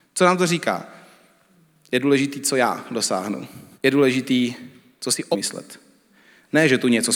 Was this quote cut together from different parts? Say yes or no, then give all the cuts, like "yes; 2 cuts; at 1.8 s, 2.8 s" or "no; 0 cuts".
yes; 2 cuts; at 3.7 s, 5.3 s